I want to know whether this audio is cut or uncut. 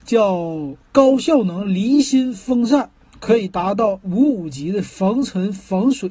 cut